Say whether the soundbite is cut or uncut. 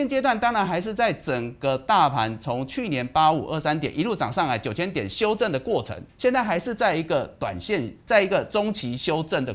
cut